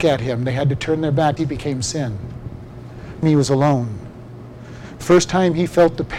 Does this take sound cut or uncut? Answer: cut